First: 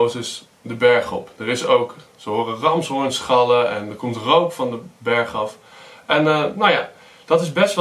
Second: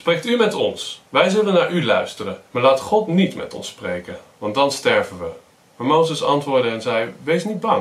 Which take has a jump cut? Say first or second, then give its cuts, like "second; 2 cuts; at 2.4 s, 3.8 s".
second; 3 cuts; at 1.1 s, 2.5 s, 5.5 s